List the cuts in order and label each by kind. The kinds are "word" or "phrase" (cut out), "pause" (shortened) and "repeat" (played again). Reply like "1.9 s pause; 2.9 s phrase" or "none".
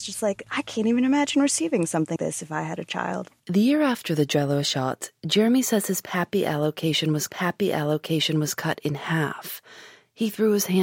2.2 s word; 3.4 s pause; 7.3 s repeat